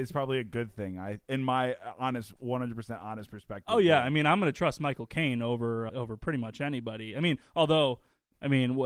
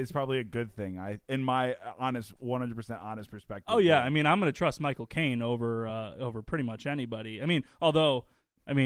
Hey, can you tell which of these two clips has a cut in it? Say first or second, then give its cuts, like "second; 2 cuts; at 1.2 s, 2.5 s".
first; 1 cut; at 5.9 s